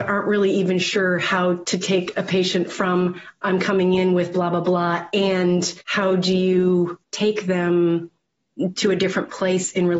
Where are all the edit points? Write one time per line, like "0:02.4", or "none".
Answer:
0:05.8
0:07.0